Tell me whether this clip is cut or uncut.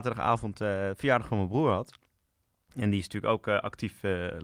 uncut